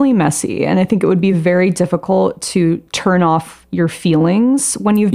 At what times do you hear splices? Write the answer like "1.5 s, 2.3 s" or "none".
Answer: none